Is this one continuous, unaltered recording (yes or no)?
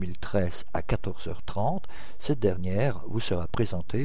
yes